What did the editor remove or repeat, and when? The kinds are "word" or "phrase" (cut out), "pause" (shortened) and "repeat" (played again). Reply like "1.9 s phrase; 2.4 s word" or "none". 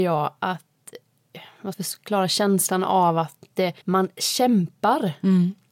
1.7 s phrase; 3.8 s pause